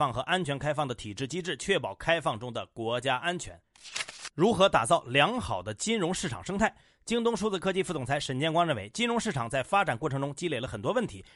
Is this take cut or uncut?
uncut